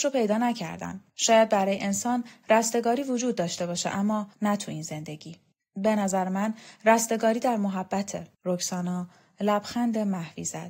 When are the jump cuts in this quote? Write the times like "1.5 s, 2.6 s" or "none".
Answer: 1.1 s, 4.3 s, 5.5 s, 8.3 s